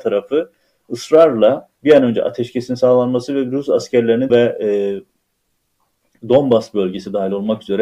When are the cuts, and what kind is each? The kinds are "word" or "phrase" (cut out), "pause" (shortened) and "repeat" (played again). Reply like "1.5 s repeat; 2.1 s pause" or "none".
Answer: 1.8 s pause; 4.3 s phrase